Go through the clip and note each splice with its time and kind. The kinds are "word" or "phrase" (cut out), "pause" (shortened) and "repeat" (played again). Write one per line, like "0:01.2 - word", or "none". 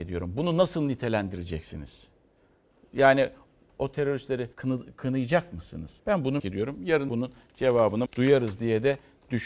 0:03.7 - phrase
0:04.5 - pause
0:06.0 - pause
0:06.4 - word
0:07.1 - word
0:08.1 - word